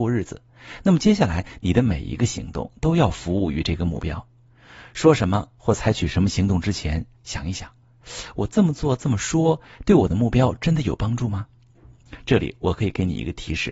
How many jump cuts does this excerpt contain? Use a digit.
1